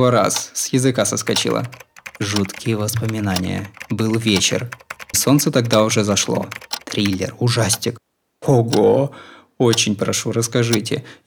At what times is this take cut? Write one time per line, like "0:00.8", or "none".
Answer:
0:05.1

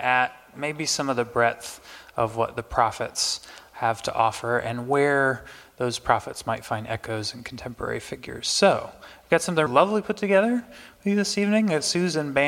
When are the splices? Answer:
0:09.7

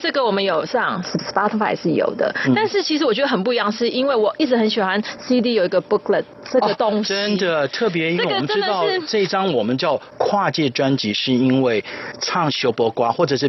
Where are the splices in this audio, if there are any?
none

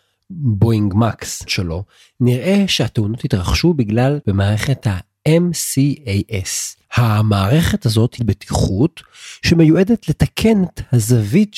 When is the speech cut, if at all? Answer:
0:01.5
0:04.2
0:06.8
0:08.2

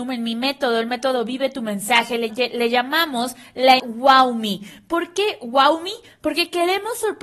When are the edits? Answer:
0:02.3
0:03.8

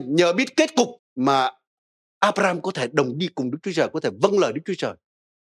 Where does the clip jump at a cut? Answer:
0:01.0

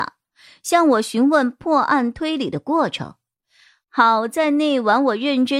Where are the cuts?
none

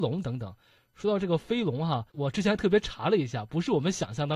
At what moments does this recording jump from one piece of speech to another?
0:02.1

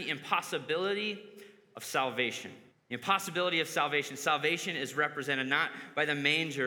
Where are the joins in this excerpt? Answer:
0:02.7

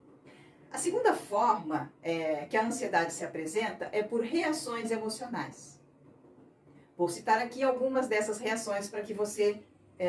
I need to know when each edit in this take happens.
none

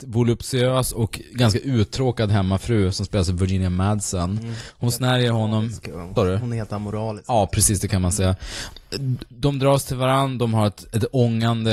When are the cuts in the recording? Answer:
0:06.2

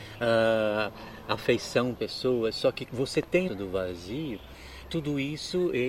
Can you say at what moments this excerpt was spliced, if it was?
0:02.0
0:02.9
0:03.5
0:04.8

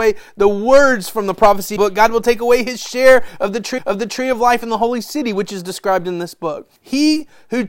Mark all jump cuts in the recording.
0:01.8
0:03.8
0:06.8

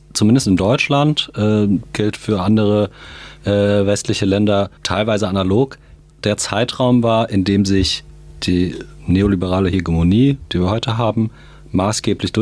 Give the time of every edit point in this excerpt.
0:04.8
0:06.1

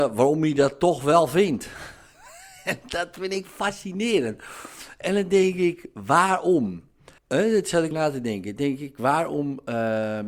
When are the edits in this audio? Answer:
0:07.2
0:07.9

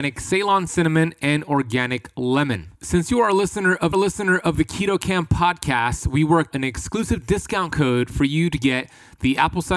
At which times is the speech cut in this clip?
0:02.7
0:03.9
0:06.5

